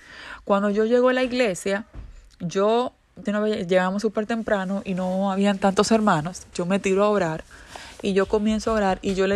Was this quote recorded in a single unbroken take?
no; 2 cuts; at 3.3 s, 6.5 s

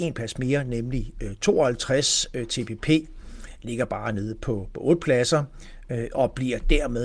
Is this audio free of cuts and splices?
yes; 0 cuts

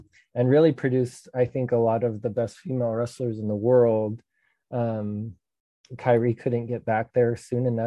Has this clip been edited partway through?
no; 0 cuts

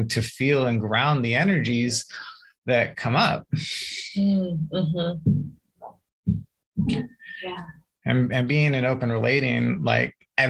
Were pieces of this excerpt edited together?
no; 0 cuts

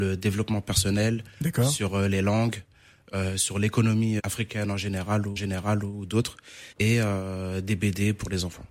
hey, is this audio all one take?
no; 3 cuts; at 4.2 s, 5.4 s, 6.7 s

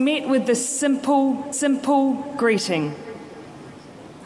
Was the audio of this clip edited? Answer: yes; 1 cut; at 1.5 s

